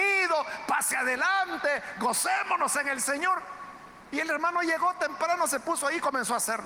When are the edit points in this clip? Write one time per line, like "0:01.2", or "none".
none